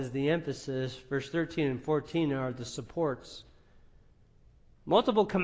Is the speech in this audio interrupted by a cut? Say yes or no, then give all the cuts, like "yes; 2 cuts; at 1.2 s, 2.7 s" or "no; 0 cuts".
no; 0 cuts